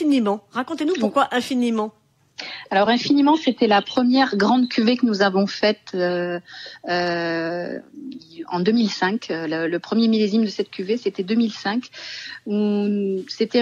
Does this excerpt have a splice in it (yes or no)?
no